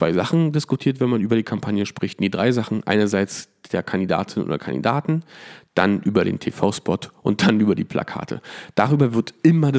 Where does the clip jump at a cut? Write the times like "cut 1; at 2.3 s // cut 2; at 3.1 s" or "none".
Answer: none